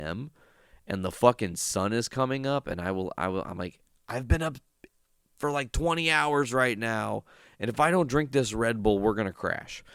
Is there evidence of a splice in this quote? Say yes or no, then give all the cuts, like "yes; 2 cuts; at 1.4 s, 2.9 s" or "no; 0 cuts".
no; 0 cuts